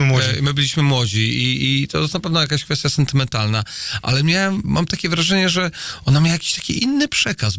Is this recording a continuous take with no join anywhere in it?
yes; 0 cuts

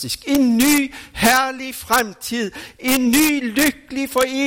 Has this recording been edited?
no; 0 cuts

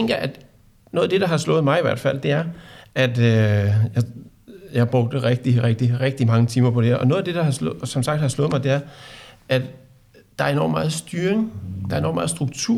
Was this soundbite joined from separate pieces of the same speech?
no; 0 cuts

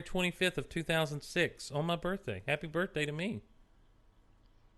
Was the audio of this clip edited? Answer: no; 0 cuts

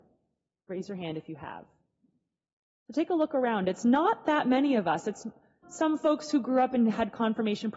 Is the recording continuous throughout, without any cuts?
no; 1 cut; at 5.6 s

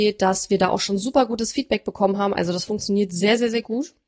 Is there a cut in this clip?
no; 0 cuts

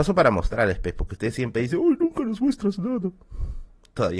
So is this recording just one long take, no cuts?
yes; 0 cuts

